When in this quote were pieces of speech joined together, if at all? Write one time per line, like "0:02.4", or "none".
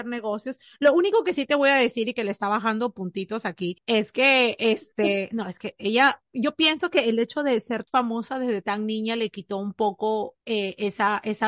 0:07.9